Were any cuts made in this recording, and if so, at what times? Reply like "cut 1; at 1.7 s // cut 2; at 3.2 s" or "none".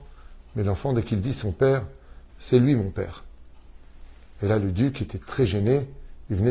cut 1; at 2.3 s